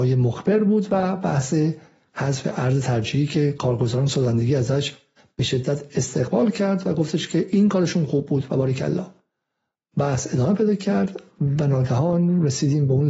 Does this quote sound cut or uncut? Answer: uncut